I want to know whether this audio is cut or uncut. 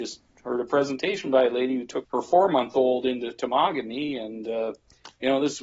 cut